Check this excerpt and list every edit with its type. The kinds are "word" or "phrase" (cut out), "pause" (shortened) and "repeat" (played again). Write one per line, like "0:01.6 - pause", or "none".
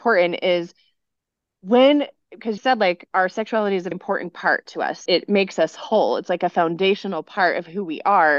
0:02.6 - word
0:03.9 - word
0:05.1 - word